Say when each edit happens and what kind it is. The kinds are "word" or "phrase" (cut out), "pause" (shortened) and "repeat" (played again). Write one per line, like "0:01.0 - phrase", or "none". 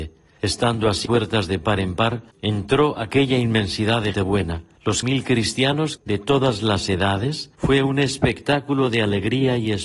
0:01.0 - word
0:02.3 - pause
0:04.1 - word
0:05.0 - word
0:06.0 - phrase
0:07.5 - pause